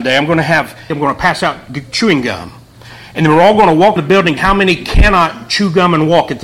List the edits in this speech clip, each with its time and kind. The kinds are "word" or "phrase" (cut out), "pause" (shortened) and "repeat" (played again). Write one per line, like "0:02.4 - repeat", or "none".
0:00.9 - word
0:04.0 - word
0:04.4 - word